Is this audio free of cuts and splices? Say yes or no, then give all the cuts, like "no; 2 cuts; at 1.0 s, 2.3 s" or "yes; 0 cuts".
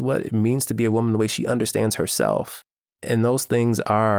yes; 0 cuts